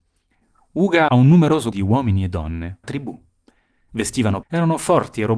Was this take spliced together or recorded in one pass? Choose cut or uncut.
cut